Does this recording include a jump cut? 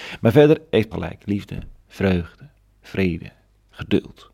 yes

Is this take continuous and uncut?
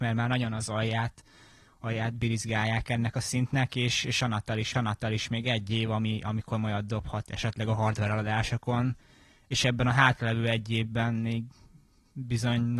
no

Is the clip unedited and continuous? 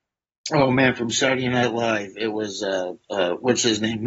yes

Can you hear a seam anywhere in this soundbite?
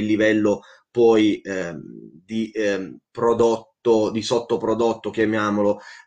no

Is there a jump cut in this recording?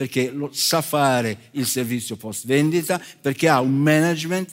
no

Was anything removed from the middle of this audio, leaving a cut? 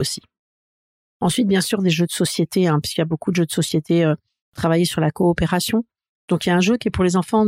no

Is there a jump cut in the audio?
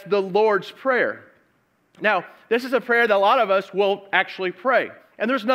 no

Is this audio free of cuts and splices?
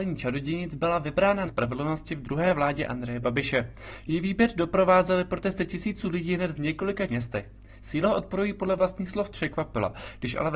no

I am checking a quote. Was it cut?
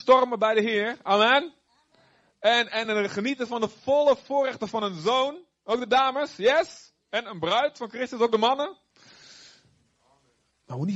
no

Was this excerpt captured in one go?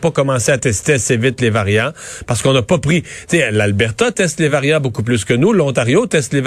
yes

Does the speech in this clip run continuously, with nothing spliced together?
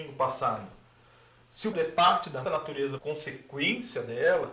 no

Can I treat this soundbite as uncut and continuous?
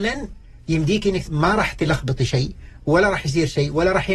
no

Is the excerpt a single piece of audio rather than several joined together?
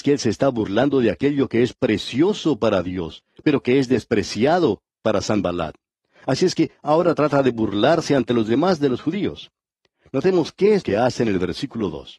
no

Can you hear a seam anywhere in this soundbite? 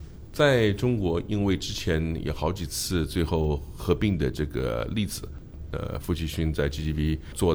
no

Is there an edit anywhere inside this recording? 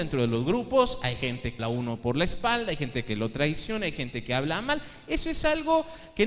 yes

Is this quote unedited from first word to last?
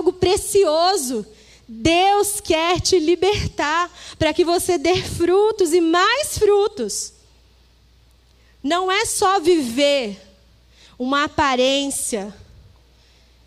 yes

